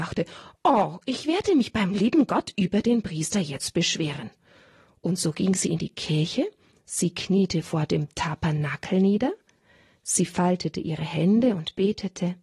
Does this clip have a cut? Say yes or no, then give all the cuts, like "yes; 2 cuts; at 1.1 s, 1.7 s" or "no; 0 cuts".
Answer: no; 0 cuts